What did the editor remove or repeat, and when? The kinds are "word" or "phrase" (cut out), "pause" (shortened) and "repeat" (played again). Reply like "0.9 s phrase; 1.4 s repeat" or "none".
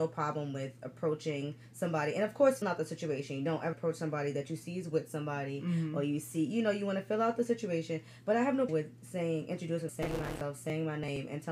2.6 s word; 3.7 s word; 8.7 s word; 9.9 s word